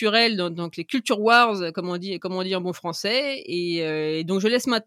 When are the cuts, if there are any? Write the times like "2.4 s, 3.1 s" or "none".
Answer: none